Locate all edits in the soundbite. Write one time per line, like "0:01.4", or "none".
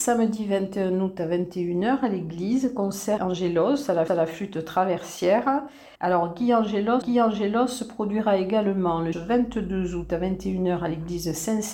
0:03.2
0:04.1
0:05.9
0:07.0
0:09.1